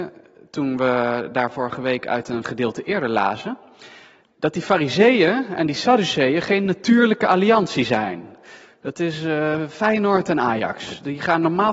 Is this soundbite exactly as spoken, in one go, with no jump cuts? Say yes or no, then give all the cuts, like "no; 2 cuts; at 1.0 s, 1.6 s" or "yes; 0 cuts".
yes; 0 cuts